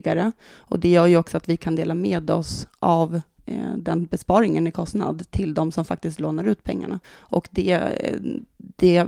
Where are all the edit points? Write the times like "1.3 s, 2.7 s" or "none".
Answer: 7.0 s